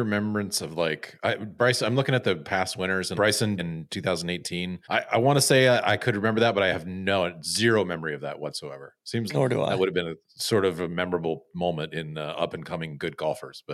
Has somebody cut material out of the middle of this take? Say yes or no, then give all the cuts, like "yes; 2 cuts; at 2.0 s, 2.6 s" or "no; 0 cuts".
yes; 5 cuts; at 3.1 s, 3.6 s, 4.8 s, 9.3 s, 10.2 s